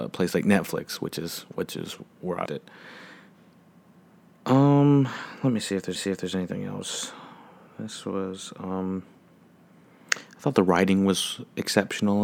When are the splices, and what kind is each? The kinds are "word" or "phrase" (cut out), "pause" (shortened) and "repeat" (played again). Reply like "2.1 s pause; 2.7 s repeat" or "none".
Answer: 2.4 s word; 5.9 s repeat